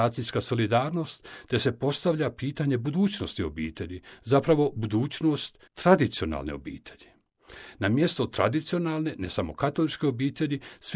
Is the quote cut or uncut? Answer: cut